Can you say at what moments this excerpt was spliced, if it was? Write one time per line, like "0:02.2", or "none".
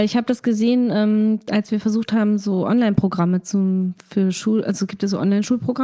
none